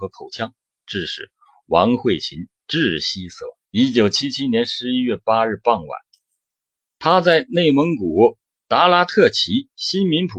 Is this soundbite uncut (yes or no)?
no